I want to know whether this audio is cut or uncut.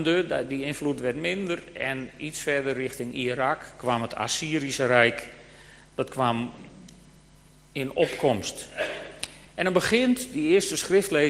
uncut